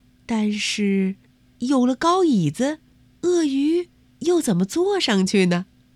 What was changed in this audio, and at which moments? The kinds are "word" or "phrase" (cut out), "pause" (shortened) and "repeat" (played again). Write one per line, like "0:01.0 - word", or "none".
0:01.3 - pause
0:02.9 - pause
0:04.0 - pause